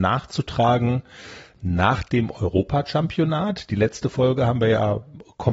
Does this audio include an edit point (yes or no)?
no